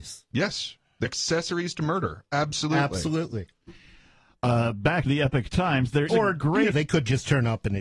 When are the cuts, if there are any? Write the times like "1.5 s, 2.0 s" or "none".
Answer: 1.0 s, 5.1 s, 6.1 s, 6.7 s